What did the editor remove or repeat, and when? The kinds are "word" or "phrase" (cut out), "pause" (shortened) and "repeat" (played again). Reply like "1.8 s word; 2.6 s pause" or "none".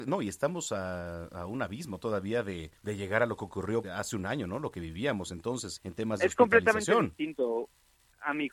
2.8 s pause; 3.8 s word; 5.8 s word